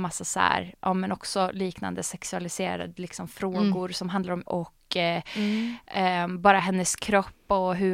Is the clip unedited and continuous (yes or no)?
no